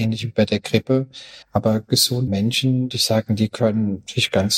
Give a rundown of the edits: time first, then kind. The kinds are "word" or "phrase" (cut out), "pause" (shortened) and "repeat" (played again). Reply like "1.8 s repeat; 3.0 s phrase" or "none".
1.4 s pause; 2.3 s word; 2.9 s word